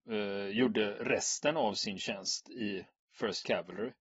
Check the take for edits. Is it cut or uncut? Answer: uncut